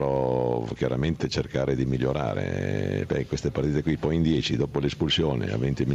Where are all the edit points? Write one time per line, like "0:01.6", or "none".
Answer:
none